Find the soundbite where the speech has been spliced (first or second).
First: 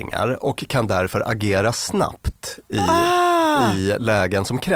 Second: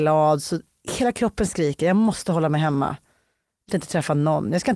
second